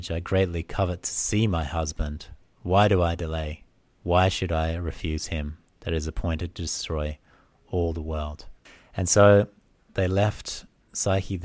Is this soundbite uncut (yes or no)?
yes